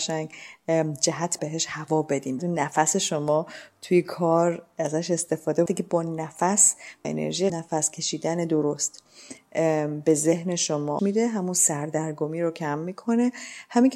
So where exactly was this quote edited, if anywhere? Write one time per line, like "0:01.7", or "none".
0:01.4
0:02.4
0:05.7
0:07.0
0:07.5
0:11.0